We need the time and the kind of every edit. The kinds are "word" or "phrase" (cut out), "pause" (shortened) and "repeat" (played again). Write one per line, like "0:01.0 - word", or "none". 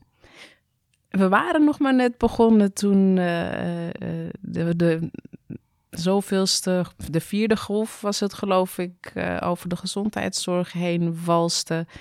none